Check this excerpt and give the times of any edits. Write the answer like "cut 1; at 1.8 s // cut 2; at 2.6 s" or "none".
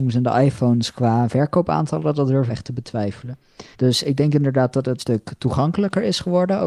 cut 1; at 2.5 s // cut 2; at 3.7 s // cut 3; at 5.0 s